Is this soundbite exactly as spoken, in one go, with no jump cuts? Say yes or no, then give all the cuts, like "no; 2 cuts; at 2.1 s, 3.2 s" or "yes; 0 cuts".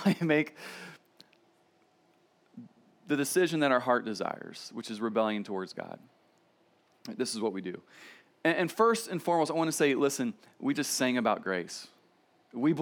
yes; 0 cuts